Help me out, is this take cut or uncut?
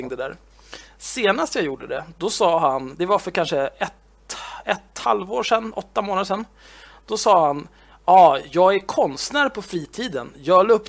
uncut